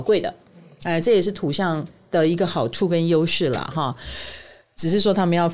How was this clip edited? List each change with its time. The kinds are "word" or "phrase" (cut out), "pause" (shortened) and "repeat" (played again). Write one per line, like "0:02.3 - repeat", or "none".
none